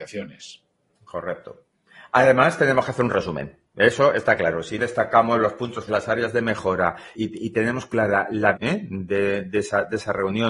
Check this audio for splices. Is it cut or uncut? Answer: cut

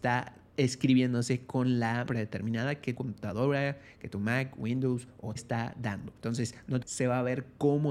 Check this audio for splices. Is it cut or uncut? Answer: cut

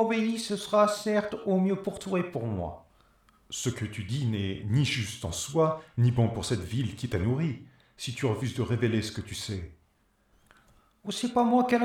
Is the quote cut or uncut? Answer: uncut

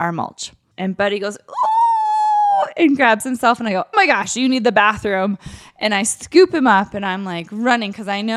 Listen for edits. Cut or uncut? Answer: cut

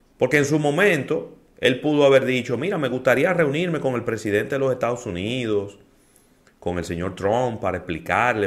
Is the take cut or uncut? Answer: uncut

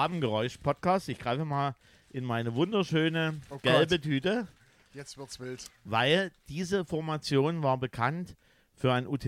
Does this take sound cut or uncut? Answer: uncut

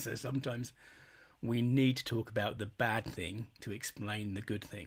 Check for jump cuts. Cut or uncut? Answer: uncut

